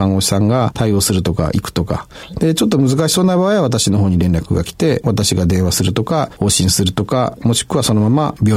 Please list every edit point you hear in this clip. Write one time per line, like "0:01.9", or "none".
none